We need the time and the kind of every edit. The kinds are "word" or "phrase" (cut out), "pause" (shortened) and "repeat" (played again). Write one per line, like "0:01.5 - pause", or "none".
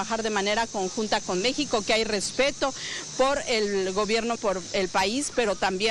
0:04.4 - word